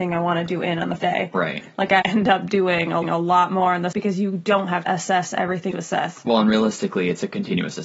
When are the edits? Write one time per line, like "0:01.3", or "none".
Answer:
0:01.0
0:02.0
0:03.0
0:03.9
0:04.9
0:05.7